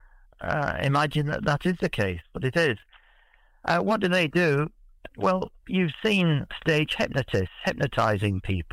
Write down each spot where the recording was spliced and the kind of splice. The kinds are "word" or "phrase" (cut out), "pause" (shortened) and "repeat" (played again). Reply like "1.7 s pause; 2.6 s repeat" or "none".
none